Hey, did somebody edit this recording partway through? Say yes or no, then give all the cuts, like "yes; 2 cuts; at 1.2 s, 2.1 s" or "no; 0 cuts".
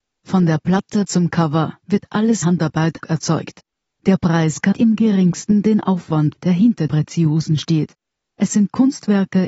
yes; 6 cuts; at 1.1 s, 2.4 s, 3.0 s, 4.7 s, 6.3 s, 6.9 s